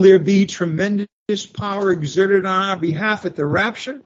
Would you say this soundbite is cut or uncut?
uncut